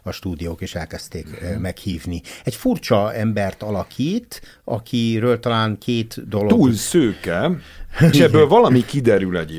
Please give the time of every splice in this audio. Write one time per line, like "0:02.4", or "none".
0:08.1

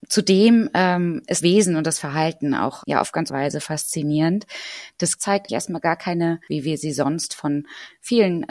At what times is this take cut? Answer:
0:01.4
0:02.8
0:03.3
0:05.2
0:05.5
0:06.5

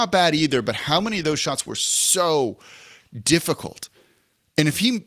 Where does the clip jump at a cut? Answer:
none

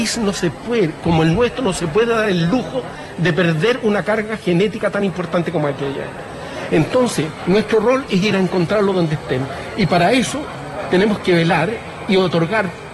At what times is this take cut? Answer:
none

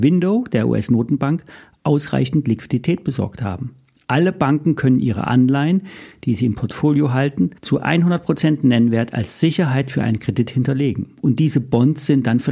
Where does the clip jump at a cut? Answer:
0:07.6

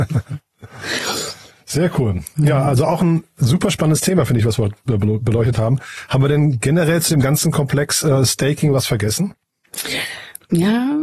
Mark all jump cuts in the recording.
none

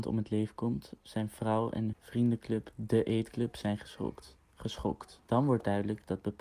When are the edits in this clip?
0:01.9
0:05.2

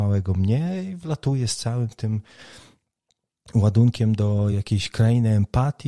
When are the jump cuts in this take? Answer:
none

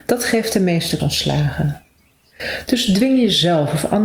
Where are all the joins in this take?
0:01.0

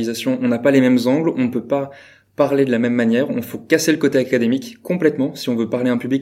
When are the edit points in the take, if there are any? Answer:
none

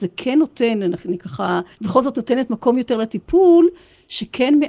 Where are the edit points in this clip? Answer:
0:01.7

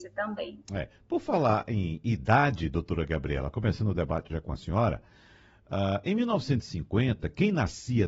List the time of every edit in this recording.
none

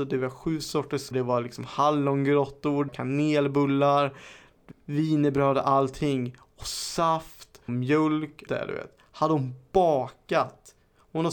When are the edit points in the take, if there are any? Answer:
0:01.1
0:02.9
0:04.7
0:07.7
0:08.5

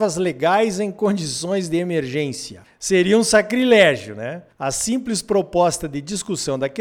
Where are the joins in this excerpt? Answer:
0:04.5

